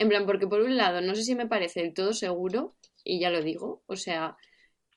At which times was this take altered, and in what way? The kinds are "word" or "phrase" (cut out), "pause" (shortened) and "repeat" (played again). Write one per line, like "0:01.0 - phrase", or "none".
none